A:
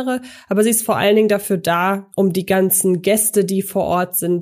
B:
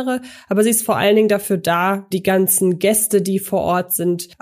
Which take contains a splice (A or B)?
B